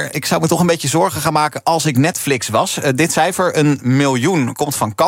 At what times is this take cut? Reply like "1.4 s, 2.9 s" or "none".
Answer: none